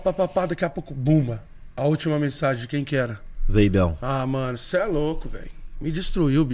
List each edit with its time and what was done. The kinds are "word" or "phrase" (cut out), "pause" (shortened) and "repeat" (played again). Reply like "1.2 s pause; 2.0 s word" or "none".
none